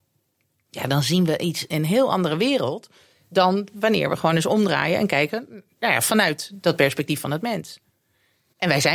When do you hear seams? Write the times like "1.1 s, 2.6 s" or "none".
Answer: none